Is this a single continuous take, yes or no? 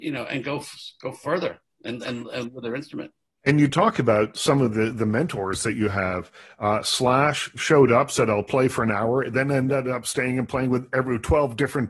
yes